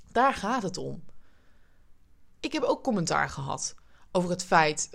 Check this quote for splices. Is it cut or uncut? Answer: uncut